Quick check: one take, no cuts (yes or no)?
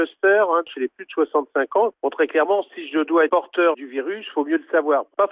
no